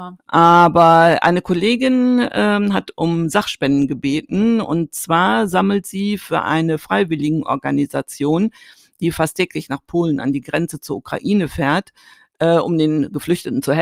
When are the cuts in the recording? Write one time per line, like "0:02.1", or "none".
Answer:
none